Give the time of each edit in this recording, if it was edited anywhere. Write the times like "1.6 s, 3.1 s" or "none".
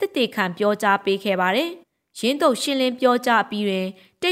1.8 s